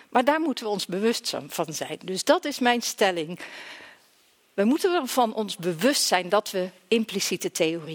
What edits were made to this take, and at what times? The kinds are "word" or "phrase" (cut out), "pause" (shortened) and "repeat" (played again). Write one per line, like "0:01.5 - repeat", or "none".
none